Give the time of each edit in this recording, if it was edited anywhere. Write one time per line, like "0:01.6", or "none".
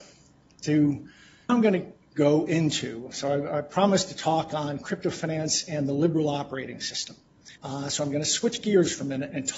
0:01.5
0:07.6